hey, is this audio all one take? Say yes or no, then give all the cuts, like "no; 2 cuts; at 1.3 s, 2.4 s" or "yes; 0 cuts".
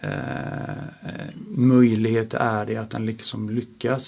yes; 0 cuts